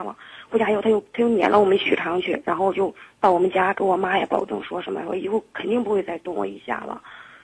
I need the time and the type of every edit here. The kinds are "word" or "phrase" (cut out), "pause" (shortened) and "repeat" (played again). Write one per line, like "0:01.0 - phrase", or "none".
none